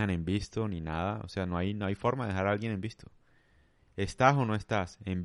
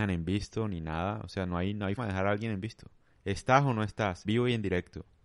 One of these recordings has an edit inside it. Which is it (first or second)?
second